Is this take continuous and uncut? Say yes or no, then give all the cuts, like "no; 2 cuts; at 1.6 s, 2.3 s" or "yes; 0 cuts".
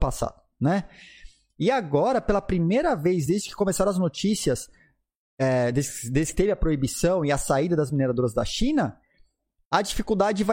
yes; 0 cuts